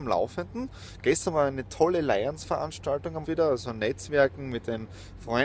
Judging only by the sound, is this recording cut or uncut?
cut